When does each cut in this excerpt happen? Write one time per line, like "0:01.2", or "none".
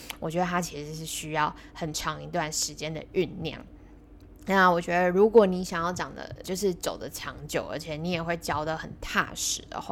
0:06.4